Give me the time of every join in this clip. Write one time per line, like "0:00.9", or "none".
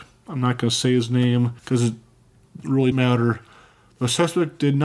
0:01.6
0:02.9

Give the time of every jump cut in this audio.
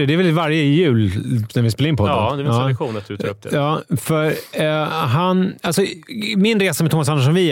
0:01.5

